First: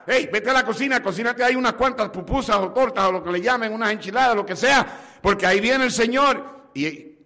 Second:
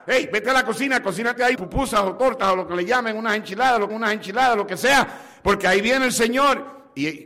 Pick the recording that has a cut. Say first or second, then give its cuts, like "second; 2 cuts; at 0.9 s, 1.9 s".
second; 2 cuts; at 1.5 s, 3.9 s